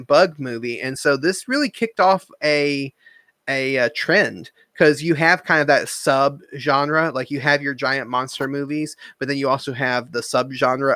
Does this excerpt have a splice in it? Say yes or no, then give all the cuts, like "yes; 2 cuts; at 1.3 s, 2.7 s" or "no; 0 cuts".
no; 0 cuts